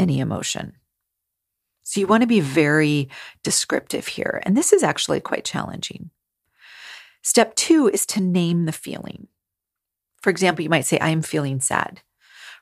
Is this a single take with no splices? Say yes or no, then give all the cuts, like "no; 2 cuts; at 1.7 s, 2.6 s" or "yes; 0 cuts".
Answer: yes; 0 cuts